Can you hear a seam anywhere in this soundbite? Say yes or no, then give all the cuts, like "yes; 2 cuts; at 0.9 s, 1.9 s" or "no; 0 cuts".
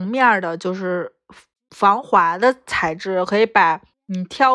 no; 0 cuts